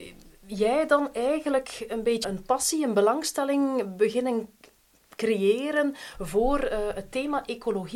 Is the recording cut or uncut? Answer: cut